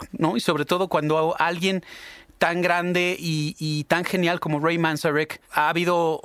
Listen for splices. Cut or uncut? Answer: uncut